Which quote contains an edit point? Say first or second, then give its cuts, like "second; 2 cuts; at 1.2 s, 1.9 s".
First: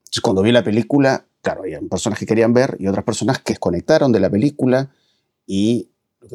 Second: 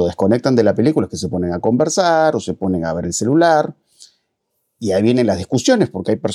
first; 2 cuts; at 1.4 s, 3.5 s